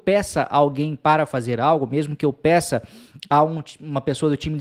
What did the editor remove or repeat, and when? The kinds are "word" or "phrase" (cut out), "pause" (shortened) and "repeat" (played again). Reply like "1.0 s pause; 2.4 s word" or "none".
none